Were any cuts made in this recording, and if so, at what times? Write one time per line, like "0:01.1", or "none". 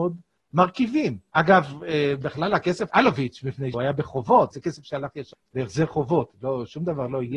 0:01.3
0:02.9
0:03.7
0:04.5
0:05.3

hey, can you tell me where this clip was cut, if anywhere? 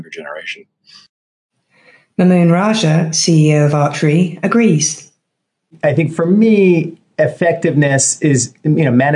none

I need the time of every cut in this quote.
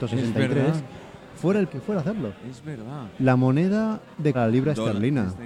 0:01.7
0:04.3

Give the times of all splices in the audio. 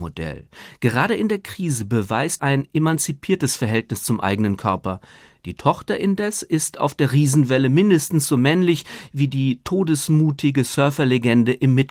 0:02.4

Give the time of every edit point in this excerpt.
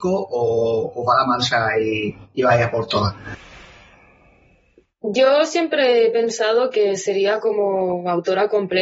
none

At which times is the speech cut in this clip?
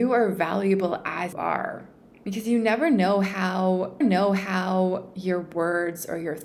0:01.3
0:02.1
0:04.0

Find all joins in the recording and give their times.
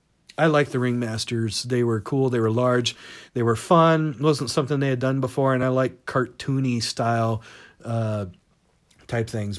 none

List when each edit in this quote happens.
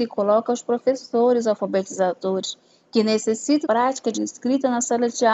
0:03.6
0:04.1

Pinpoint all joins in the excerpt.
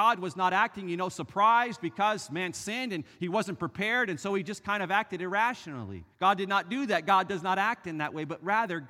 0:06.1

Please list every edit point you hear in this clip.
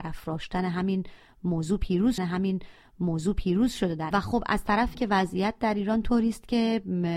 0:02.2
0:04.1
0:04.9

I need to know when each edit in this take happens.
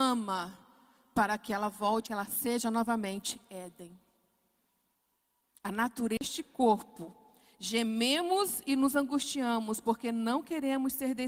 0:02.1

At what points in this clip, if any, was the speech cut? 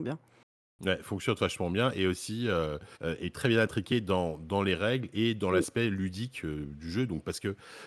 0:02.9

